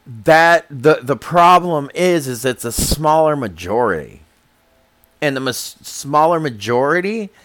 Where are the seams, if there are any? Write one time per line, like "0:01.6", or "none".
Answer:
none